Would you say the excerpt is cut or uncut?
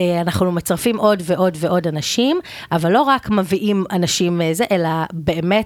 uncut